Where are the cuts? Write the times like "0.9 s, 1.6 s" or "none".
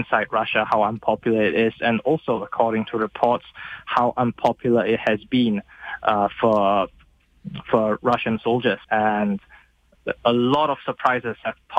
8.8 s